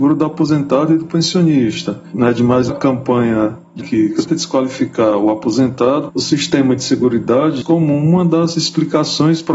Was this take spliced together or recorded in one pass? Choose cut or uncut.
cut